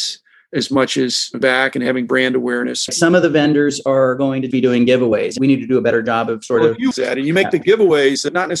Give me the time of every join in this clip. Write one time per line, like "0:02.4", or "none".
0:01.4
0:06.9